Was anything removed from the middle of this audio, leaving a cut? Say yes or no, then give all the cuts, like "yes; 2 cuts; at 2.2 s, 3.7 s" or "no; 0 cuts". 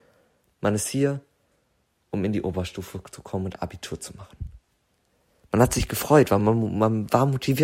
no; 0 cuts